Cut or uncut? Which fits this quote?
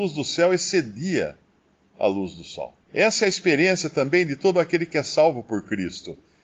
cut